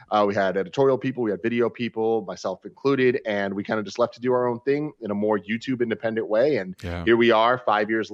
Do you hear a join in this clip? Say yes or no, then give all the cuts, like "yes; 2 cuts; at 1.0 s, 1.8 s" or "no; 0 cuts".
no; 0 cuts